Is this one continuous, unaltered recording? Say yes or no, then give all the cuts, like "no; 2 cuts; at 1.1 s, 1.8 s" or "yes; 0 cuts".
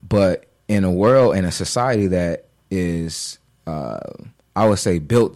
yes; 0 cuts